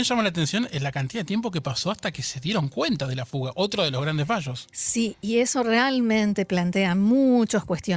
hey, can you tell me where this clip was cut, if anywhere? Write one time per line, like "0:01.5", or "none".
none